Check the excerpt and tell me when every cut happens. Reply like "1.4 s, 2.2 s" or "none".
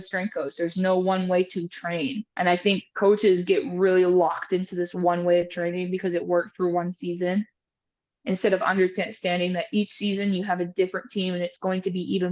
2.3 s